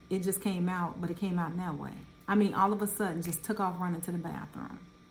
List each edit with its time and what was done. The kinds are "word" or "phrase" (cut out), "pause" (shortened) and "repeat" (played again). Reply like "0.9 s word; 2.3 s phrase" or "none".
2.2 s pause